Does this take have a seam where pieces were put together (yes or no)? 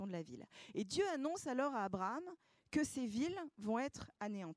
no